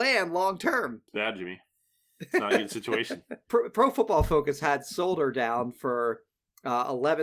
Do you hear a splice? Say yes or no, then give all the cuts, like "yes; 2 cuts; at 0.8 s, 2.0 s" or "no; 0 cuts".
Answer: no; 0 cuts